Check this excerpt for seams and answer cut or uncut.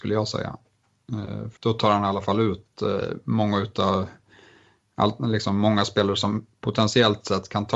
cut